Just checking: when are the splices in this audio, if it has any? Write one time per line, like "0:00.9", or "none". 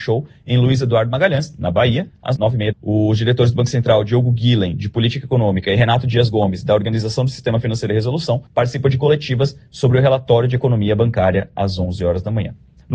0:02.7
0:08.5